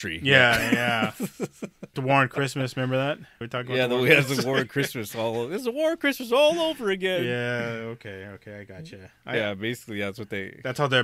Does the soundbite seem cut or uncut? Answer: cut